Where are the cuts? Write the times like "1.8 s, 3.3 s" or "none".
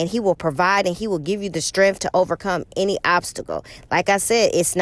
none